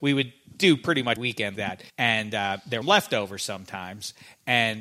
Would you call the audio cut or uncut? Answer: cut